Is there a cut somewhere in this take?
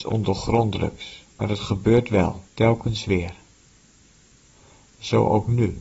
yes; 2 cuts; at 1.3 s, 2.5 s

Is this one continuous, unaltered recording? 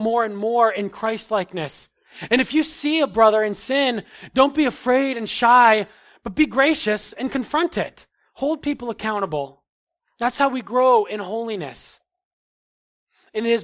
yes; 0 cuts

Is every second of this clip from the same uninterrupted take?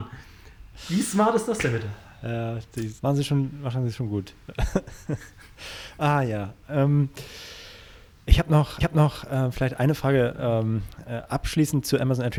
no; 2 cuts; at 3.0 s, 8.8 s

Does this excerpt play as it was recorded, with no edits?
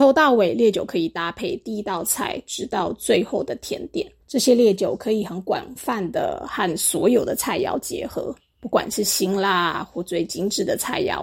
no; 1 cut; at 4.2 s

